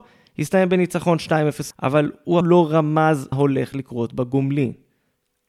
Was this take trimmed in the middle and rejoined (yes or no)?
yes